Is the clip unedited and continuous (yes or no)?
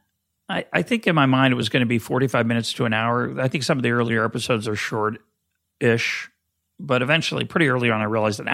yes